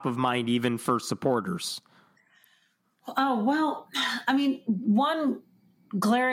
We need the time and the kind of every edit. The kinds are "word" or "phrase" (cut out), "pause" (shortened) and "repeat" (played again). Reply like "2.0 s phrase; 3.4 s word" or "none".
none